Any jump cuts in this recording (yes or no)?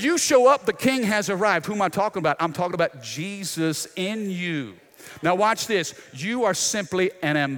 no